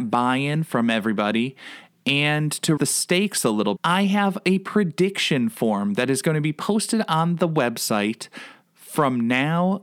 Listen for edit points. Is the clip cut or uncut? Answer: cut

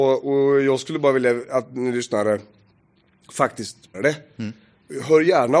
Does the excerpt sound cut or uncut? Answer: cut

